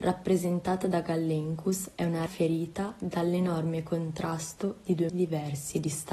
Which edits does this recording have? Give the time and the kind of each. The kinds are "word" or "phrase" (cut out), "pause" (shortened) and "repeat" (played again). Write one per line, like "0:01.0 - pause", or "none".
0:02.3 - word
0:05.1 - word